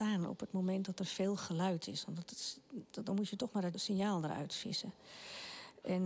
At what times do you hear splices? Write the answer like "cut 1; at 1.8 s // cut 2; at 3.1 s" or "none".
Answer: cut 1; at 3.7 s